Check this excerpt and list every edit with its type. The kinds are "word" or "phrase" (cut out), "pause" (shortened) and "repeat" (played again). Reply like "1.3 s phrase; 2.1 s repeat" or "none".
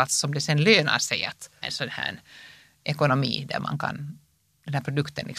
1.6 s word